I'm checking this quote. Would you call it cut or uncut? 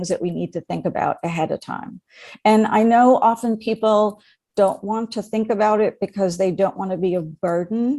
uncut